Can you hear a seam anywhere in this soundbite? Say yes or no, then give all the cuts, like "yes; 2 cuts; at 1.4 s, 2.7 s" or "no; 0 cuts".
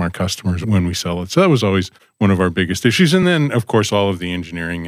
no; 0 cuts